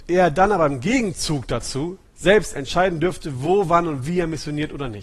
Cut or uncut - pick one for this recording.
cut